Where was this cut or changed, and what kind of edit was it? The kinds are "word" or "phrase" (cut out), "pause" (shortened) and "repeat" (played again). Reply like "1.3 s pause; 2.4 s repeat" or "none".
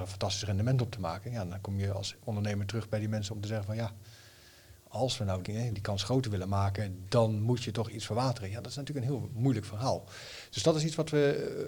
5.4 s word